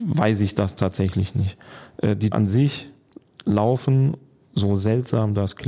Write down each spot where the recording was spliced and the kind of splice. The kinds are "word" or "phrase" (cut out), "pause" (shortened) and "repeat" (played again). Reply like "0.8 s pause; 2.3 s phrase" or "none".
2.3 s word